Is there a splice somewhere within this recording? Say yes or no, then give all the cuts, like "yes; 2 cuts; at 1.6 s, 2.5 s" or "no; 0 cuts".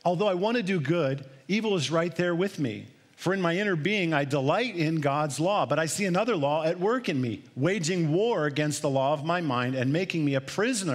no; 0 cuts